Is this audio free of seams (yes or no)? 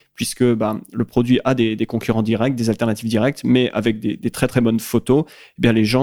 yes